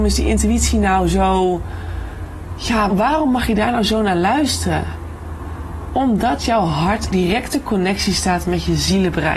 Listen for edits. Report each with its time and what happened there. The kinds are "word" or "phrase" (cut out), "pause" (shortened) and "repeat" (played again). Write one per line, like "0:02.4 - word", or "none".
0:02.9 - word
0:07.1 - word

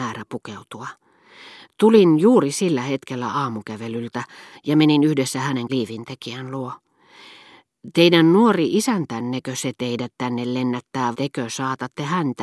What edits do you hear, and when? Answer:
0:05.7 - word
0:11.1 - word

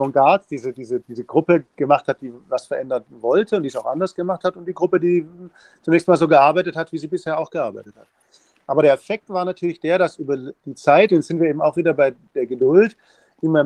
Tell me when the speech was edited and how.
none

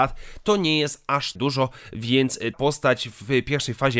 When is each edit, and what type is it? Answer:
0:01.4 - word
0:02.5 - word

